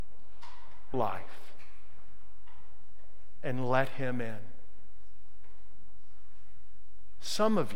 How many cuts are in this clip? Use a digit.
1